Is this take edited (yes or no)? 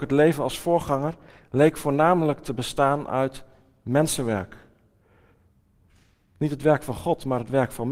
no